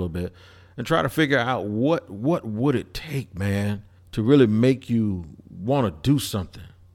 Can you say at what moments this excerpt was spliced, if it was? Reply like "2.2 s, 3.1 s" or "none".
4.0 s